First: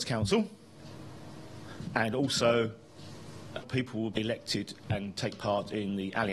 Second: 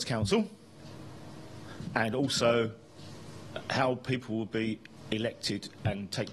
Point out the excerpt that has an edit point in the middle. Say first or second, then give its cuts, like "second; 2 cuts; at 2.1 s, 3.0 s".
first; 2 cuts; at 3.6 s, 4.1 s